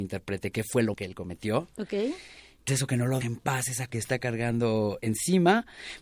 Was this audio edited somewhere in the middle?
yes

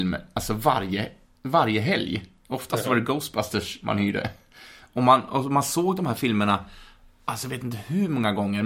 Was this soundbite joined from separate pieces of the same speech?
no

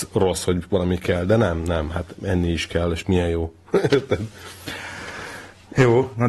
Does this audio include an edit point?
no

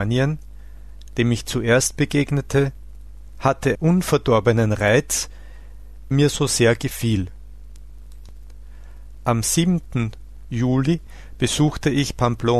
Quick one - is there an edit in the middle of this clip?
yes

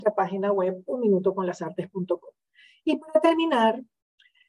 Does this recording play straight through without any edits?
yes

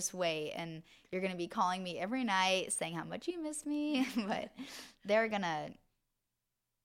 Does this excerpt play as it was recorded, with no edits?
yes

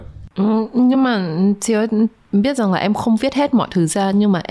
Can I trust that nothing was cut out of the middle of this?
yes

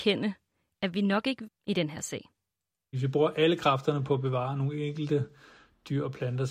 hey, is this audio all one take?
no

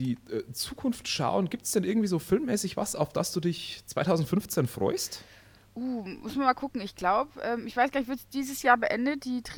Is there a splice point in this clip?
no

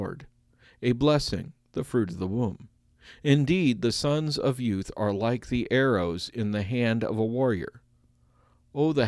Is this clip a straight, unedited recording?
yes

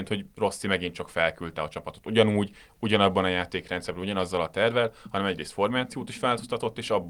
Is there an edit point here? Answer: no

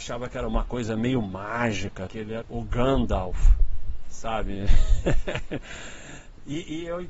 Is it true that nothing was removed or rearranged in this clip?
no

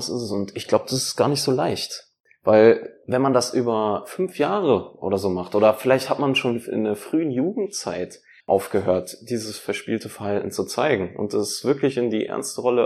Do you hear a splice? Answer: yes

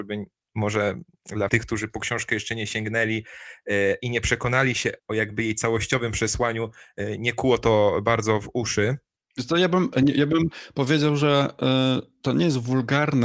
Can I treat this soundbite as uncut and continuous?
no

